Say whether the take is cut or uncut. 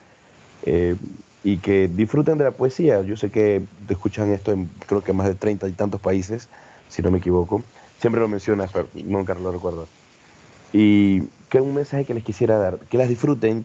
uncut